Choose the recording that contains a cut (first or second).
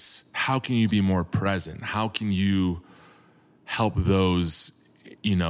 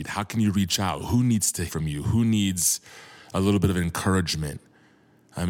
second